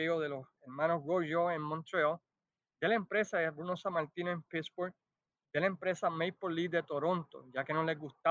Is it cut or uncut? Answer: uncut